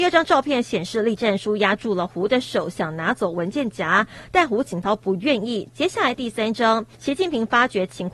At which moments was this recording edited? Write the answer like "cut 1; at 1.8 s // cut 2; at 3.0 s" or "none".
cut 1; at 6.9 s